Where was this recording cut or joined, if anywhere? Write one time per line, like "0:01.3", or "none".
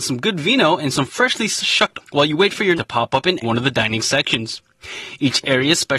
0:00.9
0:02.0
0:02.8
0:03.4